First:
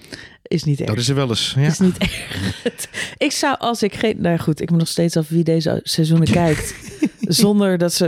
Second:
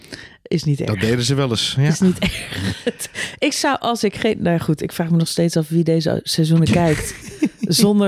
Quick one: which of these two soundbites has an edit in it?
first; 2 cuts; at 1.0 s, 4.7 s

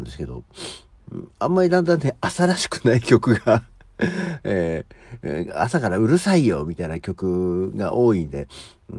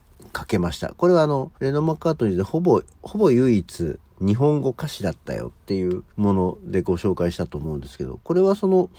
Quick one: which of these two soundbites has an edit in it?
second; 3 cuts; at 1.5 s, 4.1 s, 6.1 s

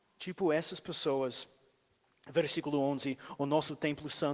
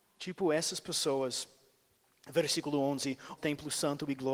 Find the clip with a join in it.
second; 1 cut; at 3.4 s

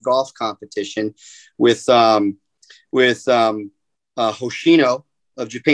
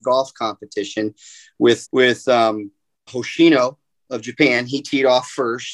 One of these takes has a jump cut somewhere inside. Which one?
second; 2 cuts; at 1.8 s, 3.1 s

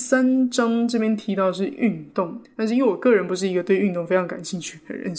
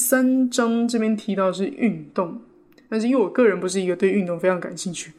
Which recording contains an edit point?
first; 1 cut; at 2.4 s

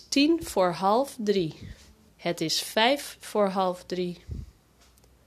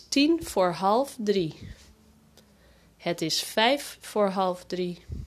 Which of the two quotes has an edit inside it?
first; 1 cut; at 2.1 s

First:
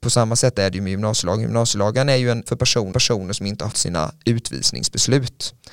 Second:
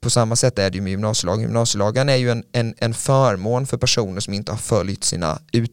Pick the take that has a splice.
first; 3 cuts; at 2.5 s, 2.9 s, 3.7 s

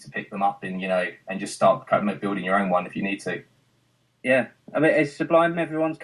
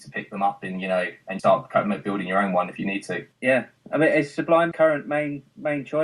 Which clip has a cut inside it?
second; 3 cuts; at 1.4 s, 3.3 s, 4.7 s

